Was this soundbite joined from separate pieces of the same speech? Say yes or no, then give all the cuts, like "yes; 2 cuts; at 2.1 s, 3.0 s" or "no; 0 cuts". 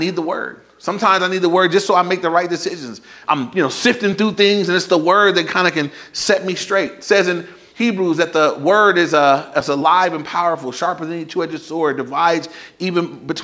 no; 0 cuts